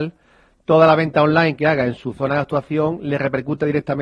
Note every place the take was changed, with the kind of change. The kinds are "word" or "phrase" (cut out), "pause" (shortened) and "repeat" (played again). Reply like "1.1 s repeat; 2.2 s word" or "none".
none